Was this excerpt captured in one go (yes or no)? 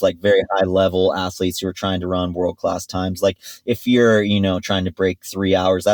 yes